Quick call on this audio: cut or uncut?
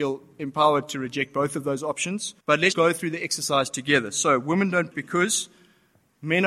cut